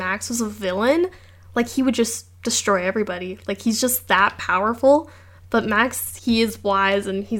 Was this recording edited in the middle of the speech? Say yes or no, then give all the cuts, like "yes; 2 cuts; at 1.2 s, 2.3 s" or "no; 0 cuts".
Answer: yes; 1 cut; at 6.2 s